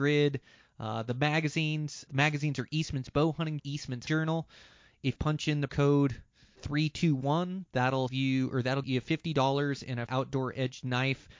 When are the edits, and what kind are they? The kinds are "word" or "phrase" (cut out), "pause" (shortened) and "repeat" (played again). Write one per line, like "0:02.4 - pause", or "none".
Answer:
0:02.1 - word
0:03.6 - word
0:04.1 - word
0:05.2 - word
0:05.7 - word
0:06.6 - word
0:08.1 - word
0:08.8 - word
0:10.1 - word

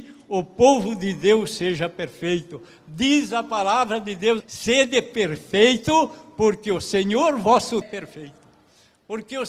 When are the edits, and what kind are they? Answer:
0:04.4 - word
0:07.8 - phrase

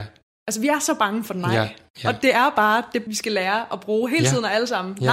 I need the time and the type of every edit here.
0:03.1 - phrase

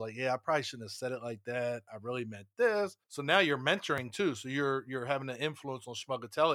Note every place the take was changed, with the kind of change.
0:03.0 - pause

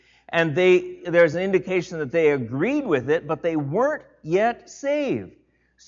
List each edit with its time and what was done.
none

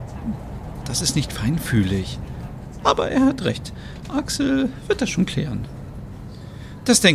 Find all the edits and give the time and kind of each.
none

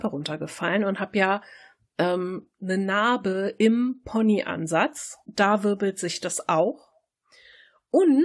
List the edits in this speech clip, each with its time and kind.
none

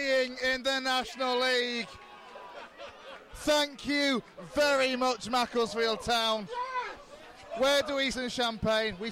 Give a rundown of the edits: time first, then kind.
0:08.1 - phrase

